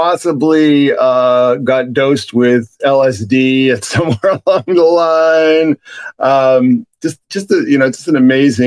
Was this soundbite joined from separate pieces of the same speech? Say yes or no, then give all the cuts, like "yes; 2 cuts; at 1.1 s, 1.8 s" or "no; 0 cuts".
no; 0 cuts